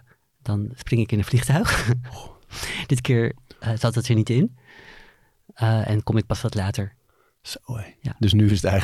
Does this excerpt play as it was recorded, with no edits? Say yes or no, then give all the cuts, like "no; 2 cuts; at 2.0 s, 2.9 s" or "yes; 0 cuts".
yes; 0 cuts